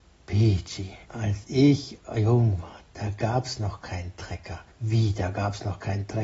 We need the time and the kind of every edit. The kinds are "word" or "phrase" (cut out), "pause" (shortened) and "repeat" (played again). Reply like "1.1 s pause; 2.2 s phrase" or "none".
1.0 s pause; 4.7 s pause